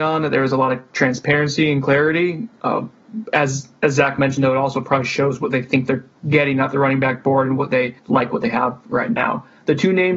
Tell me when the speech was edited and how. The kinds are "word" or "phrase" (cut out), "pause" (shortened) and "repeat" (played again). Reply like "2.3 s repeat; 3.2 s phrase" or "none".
8.0 s pause

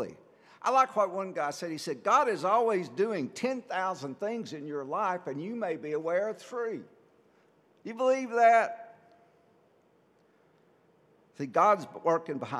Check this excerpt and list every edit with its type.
none

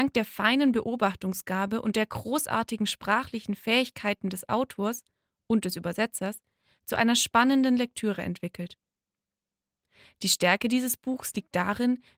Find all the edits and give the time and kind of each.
none

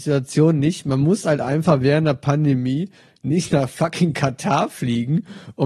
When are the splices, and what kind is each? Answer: none

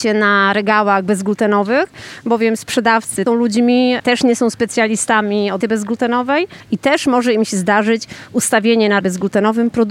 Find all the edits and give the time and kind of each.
3.3 s phrase; 5.6 s word; 6.6 s pause; 9.0 s word

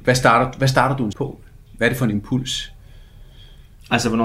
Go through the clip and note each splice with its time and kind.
1.1 s word

